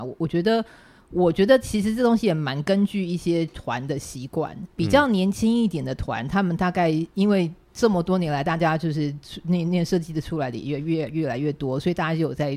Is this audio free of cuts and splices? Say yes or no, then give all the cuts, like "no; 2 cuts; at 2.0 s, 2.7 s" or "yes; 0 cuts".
no; 1 cut; at 4.7 s